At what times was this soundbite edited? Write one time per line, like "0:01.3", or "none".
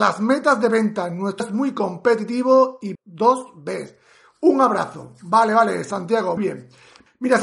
0:01.4
0:02.9
0:06.4